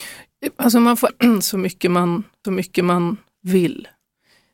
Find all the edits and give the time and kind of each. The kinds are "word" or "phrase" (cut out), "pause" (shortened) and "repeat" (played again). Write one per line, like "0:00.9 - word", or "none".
0:01.1 - word
0:02.4 - repeat